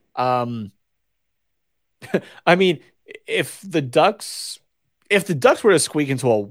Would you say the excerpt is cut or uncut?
uncut